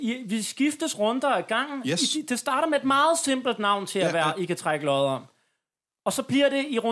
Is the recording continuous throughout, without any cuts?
yes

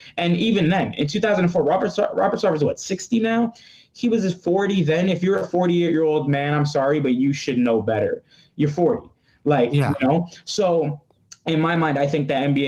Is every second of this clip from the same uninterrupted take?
yes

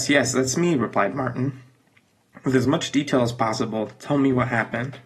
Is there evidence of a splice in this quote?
no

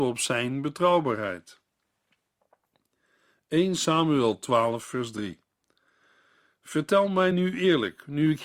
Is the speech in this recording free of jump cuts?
yes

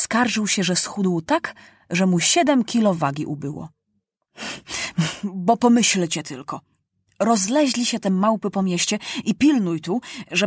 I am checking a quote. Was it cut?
no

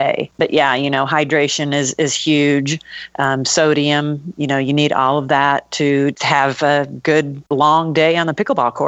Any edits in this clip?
no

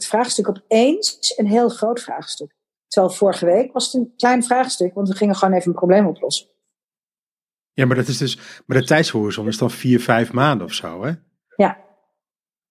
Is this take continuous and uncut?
yes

